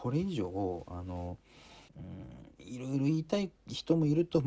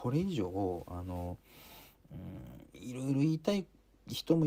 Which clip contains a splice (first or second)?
first